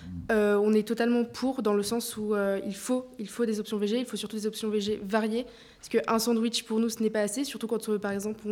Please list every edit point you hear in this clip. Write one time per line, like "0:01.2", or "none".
none